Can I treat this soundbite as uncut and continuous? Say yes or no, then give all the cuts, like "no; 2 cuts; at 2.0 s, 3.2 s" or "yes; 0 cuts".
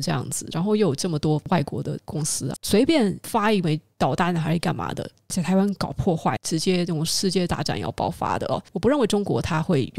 no; 1 cut; at 2.6 s